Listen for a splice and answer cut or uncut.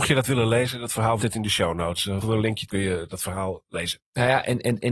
cut